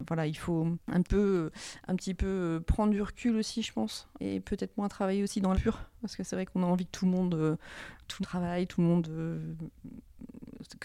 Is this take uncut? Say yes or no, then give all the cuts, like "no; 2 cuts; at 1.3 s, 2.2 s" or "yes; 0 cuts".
no; 4 cuts; at 1.0 s, 4.2 s, 5.5 s, 8.2 s